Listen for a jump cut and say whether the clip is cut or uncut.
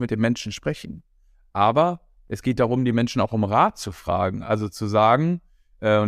uncut